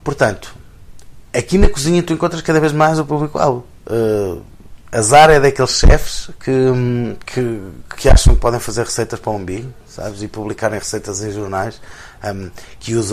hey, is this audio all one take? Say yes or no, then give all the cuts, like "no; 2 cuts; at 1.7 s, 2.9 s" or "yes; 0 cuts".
yes; 0 cuts